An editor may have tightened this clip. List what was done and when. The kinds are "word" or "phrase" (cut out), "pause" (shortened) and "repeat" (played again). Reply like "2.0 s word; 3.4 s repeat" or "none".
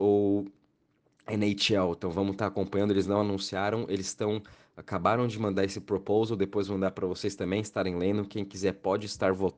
none